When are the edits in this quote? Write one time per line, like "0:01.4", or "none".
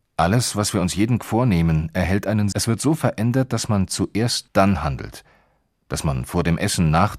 0:01.2
0:02.5
0:04.5